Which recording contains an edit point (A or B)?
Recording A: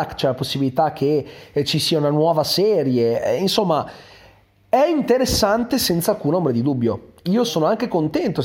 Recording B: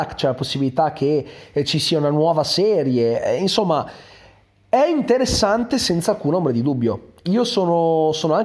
A